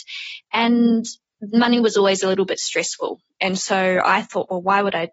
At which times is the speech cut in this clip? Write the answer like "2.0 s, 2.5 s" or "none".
none

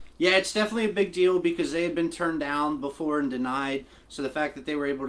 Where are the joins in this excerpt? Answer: none

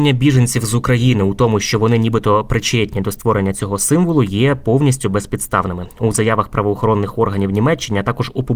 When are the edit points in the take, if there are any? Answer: none

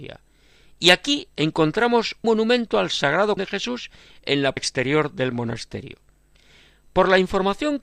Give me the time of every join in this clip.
2.2 s, 3.4 s, 4.6 s

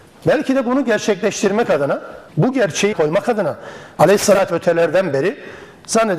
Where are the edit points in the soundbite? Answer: 2.3 s, 2.9 s, 4.5 s

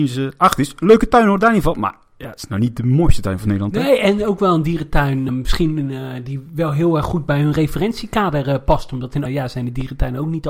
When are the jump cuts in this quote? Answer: 5.3 s, 9.3 s

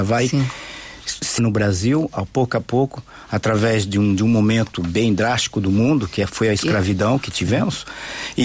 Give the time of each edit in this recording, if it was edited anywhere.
1.4 s

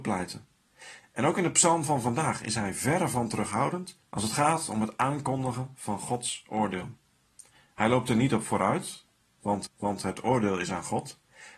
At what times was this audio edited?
4.0 s, 9.7 s

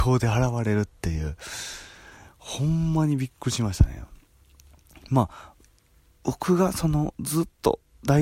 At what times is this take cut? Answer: none

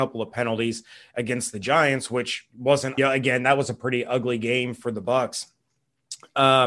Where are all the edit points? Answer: 3.0 s

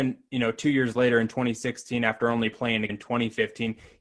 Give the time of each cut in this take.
2.9 s

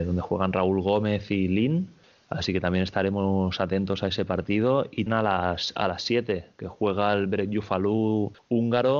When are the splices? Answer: 5.1 s

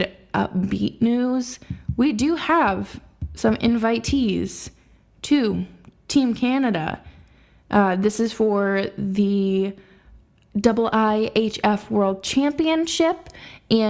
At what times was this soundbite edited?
none

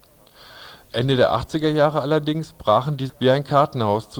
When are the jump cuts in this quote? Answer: 3.1 s

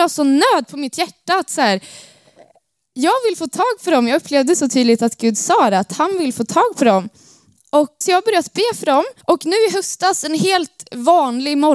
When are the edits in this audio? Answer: 8.0 s, 9.2 s

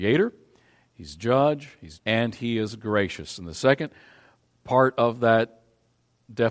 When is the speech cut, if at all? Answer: 2.0 s

